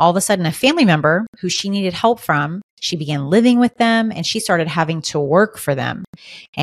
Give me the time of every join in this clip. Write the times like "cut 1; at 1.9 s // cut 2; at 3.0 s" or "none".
cut 1; at 2.7 s